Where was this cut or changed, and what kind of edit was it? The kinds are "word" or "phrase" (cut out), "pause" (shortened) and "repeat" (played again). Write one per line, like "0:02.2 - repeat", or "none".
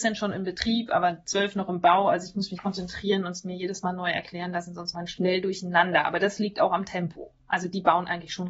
0:02.6 - phrase
0:04.9 - word